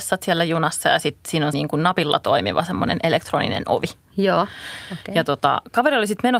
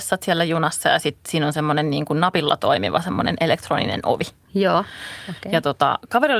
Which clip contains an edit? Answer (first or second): first